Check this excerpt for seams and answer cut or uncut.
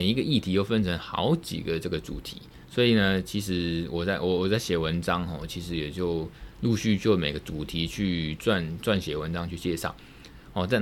cut